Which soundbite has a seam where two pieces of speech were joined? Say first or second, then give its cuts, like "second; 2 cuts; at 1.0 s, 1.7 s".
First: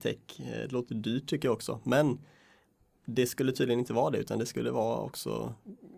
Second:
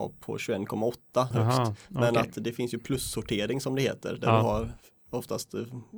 second; 1 cut; at 1.3 s